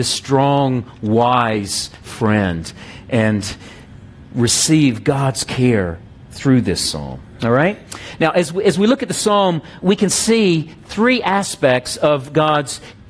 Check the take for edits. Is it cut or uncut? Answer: cut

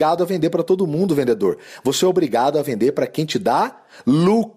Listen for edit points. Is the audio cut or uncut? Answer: uncut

